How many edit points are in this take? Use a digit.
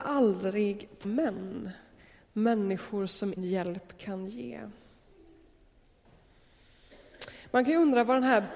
2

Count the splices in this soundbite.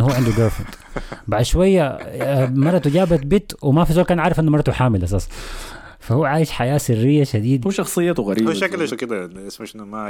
2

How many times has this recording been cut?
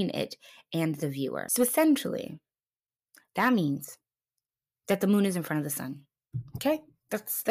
0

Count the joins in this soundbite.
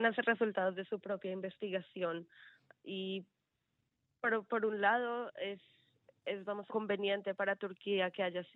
1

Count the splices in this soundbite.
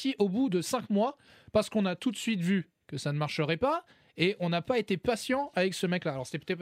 0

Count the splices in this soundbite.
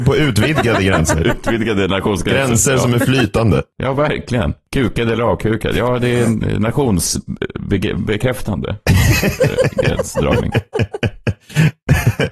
0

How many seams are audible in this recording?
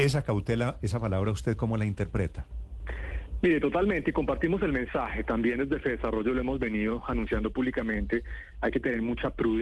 0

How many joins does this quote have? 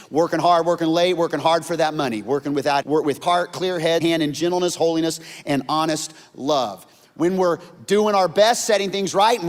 3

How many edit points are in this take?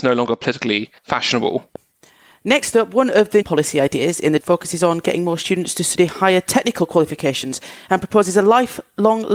3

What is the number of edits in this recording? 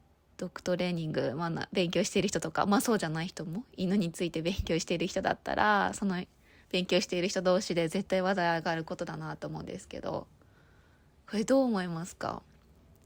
0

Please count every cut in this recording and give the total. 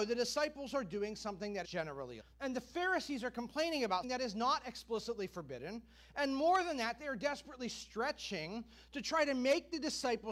3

